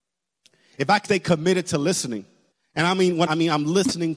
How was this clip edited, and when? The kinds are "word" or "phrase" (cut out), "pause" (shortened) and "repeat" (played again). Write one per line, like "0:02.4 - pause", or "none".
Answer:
0:01.0 - word
0:02.5 - pause
0:03.3 - phrase